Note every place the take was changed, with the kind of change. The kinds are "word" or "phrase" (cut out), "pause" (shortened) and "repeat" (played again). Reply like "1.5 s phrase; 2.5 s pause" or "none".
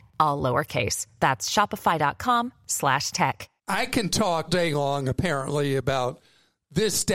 3.6 s pause; 4.5 s word